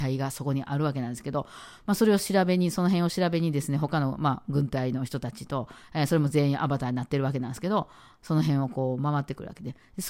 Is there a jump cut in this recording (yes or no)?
no